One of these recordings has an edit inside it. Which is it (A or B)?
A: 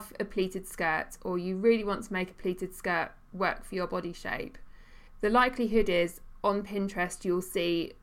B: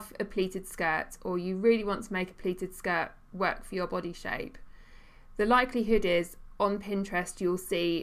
A